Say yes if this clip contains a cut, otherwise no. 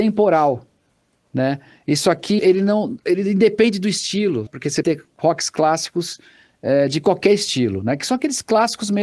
yes